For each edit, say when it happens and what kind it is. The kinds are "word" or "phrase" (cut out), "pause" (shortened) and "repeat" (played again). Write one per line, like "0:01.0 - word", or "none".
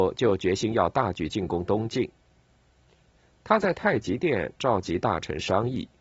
none